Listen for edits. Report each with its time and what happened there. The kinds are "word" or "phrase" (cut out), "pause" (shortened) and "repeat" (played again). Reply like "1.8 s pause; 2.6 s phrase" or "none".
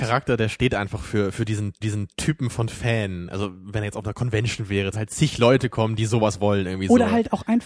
1.8 s repeat; 4.9 s phrase